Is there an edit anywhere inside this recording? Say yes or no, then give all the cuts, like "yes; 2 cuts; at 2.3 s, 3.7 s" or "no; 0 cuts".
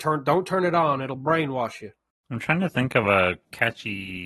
no; 0 cuts